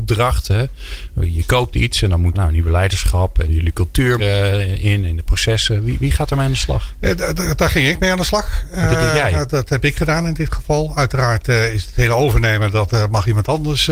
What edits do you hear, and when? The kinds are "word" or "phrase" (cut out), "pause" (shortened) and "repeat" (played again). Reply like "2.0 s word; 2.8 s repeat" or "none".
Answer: 2.3 s word; 3.5 s word; 4.2 s phrase